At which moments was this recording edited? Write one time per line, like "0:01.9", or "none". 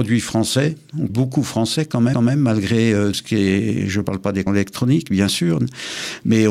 0:01.1
0:02.1
0:03.1
0:04.5